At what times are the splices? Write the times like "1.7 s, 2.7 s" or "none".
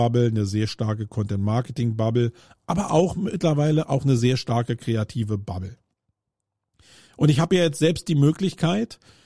none